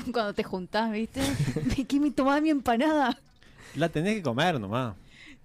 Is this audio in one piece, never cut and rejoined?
yes; 0 cuts

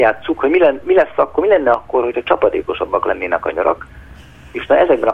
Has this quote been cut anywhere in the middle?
no; 0 cuts

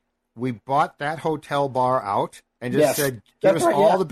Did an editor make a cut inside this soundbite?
yes; 1 cut; at 2.5 s

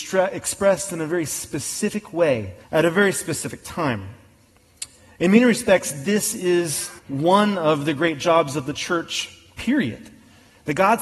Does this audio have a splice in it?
yes; 2 cuts; at 2.6 s, 7.0 s

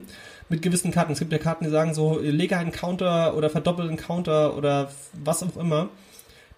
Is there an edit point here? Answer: no; 0 cuts

